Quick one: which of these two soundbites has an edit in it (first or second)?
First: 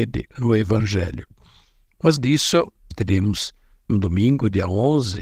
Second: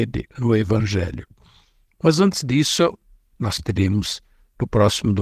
first